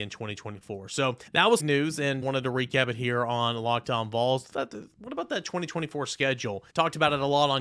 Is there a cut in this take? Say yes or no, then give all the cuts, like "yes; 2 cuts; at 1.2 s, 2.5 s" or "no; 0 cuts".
yes; 4 cuts; at 1.3 s, 1.6 s, 2.2 s, 6.7 s